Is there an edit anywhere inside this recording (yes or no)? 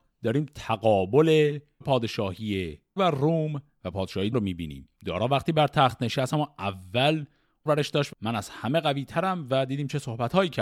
yes